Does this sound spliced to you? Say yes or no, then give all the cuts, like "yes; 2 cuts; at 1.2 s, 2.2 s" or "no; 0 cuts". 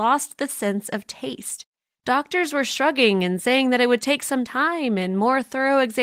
no; 0 cuts